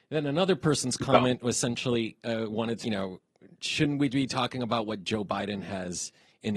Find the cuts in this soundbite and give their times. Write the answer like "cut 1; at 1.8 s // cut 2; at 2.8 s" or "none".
cut 1; at 2.8 s